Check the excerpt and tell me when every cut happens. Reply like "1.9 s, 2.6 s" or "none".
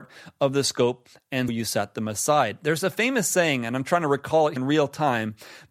1.5 s, 4.6 s